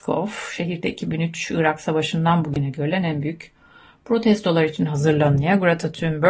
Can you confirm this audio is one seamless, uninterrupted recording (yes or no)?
yes